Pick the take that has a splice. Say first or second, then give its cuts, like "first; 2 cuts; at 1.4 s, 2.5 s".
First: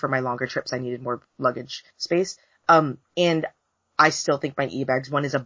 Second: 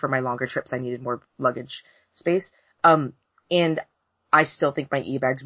first; 2 cuts; at 1.9 s, 3.0 s